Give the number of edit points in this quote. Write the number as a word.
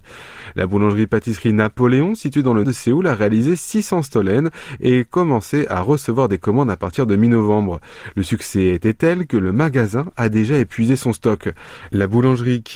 one